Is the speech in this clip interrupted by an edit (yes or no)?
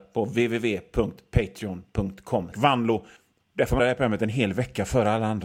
yes